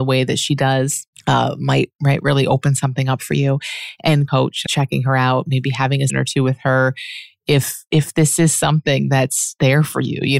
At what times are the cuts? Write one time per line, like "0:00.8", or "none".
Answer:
0:01.1
0:04.3
0:04.7
0:06.1